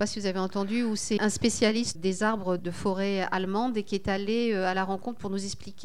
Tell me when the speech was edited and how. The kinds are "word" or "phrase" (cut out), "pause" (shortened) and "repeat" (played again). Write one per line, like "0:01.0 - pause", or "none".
0:01.2 - word
0:02.0 - word
0:02.6 - word